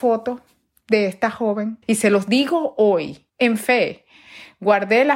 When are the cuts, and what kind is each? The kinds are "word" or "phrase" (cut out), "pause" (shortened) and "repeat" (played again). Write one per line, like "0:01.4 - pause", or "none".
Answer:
0:01.8 - pause
0:03.3 - pause